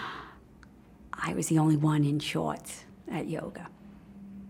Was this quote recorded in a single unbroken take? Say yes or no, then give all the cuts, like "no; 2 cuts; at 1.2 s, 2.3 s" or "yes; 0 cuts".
yes; 0 cuts